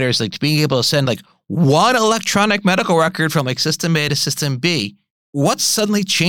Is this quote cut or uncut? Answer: uncut